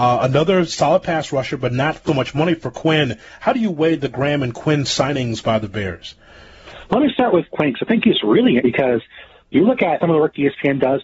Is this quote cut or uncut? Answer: cut